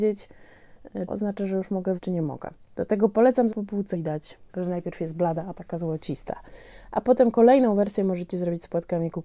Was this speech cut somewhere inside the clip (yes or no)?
yes